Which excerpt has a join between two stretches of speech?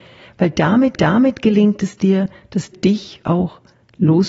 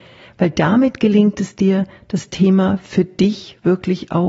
first; 3 cuts; at 0.9 s, 2.7 s, 3.2 s

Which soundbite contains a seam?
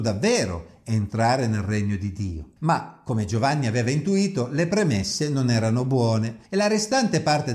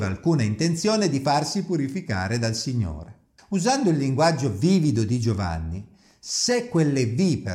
first; 2 cuts; at 2.6 s, 6.5 s

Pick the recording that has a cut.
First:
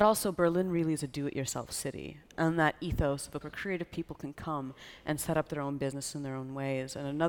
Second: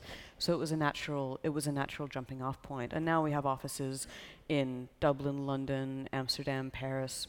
first; 1 cut; at 3.4 s

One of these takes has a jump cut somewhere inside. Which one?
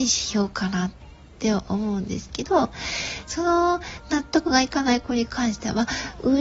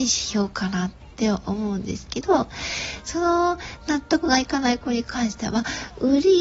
second; 1 cut; at 1.1 s

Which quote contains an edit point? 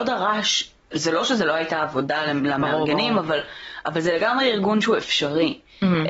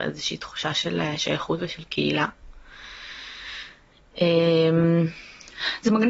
first; 1 cut; at 0.9 s

